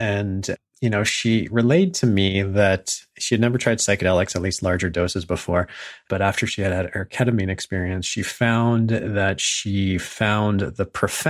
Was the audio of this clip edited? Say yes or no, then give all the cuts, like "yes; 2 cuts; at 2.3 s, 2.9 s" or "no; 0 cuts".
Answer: no; 0 cuts